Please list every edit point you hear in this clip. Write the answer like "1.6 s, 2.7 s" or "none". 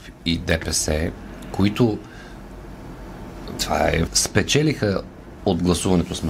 4.1 s